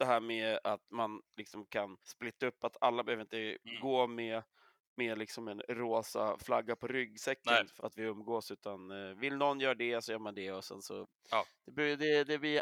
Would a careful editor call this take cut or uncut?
cut